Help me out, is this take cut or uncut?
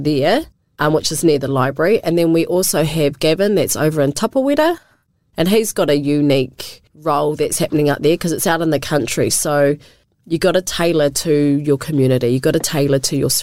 uncut